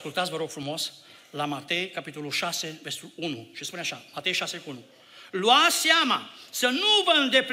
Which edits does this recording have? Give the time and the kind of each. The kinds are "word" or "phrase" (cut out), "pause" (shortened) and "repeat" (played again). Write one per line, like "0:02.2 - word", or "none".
none